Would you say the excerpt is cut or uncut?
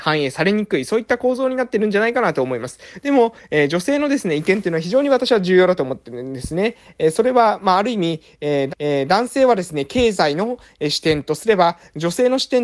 cut